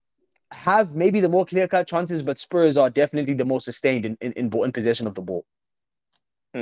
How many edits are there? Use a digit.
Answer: 0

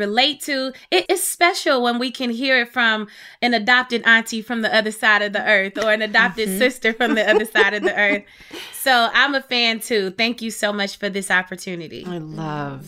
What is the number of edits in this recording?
1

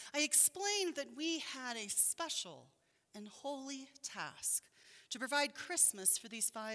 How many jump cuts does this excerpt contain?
0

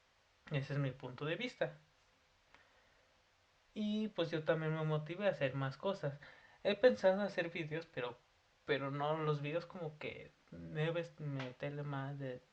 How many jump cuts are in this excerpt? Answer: 0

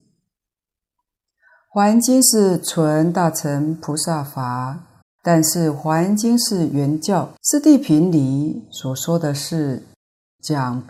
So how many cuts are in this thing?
2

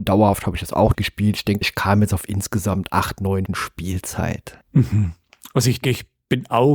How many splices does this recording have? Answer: 4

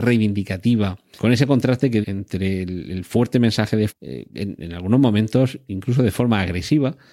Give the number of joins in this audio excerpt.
3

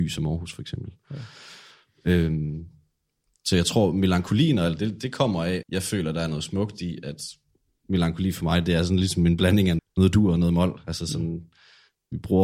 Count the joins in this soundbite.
3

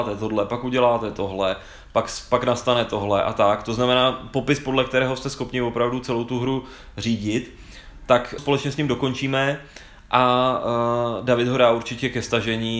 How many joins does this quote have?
1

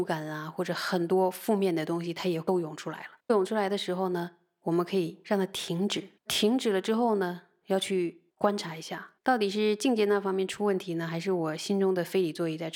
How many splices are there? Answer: 4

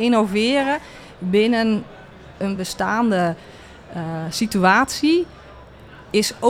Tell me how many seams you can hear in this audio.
0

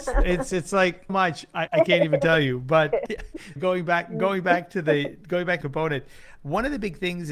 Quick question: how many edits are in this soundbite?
5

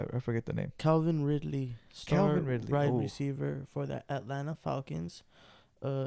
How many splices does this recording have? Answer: 0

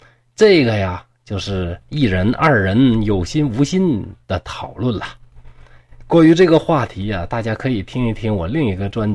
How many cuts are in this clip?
2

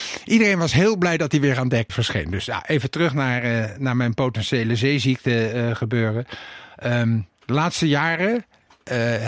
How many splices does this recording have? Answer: 1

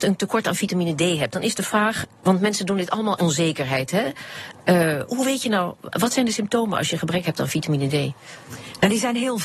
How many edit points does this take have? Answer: 2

